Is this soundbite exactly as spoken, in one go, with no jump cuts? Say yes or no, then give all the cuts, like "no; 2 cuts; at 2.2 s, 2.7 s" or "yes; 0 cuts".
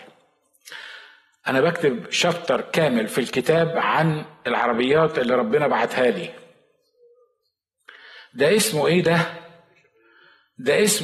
yes; 0 cuts